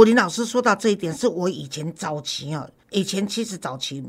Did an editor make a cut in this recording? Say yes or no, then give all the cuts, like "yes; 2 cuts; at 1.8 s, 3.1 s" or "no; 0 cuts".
yes; 1 cut; at 2.8 s